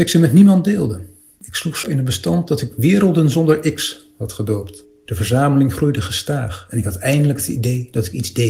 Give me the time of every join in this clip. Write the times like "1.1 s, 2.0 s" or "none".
1.8 s